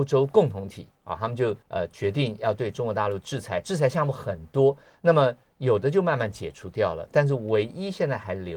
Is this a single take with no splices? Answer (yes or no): no